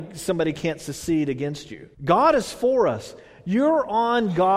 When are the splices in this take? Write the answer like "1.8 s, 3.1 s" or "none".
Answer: 1.9 s